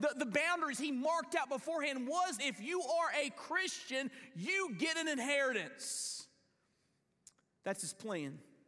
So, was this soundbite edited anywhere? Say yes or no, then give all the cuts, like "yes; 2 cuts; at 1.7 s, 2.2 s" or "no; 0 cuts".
yes; 1 cut; at 2.4 s